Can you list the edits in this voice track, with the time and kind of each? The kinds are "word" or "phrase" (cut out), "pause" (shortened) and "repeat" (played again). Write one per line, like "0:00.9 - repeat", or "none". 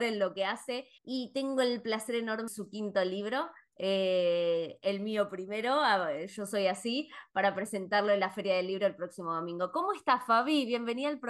0:01.0 - pause
0:02.5 - phrase